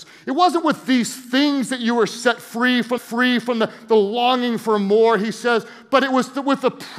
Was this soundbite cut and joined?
yes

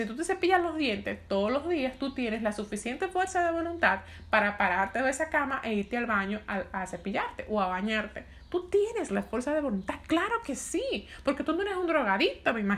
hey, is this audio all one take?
yes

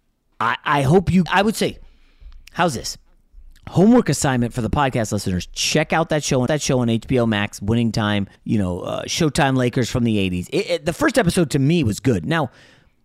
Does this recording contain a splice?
yes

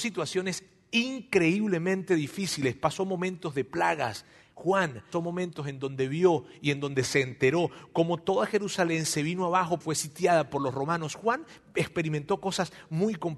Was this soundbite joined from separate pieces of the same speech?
yes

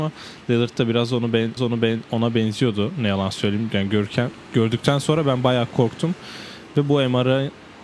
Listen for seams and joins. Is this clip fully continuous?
no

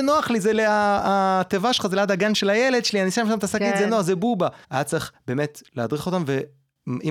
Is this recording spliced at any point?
yes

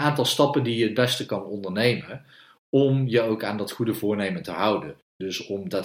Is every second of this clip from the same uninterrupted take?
yes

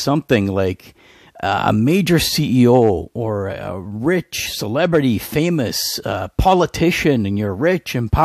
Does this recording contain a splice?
no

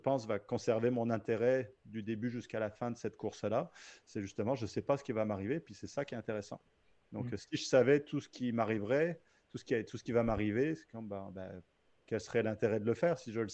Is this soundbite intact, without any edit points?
yes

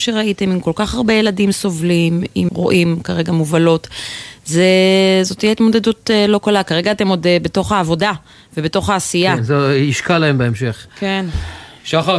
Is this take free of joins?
no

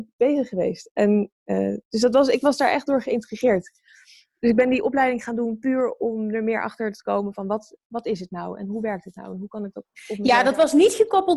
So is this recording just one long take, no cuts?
yes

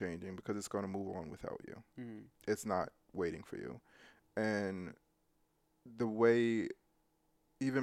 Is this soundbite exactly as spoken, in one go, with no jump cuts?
yes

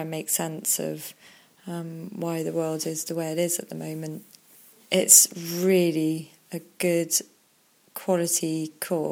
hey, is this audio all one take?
yes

